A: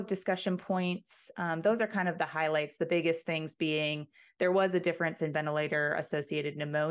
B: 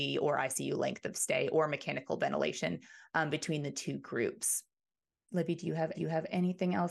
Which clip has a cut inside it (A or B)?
B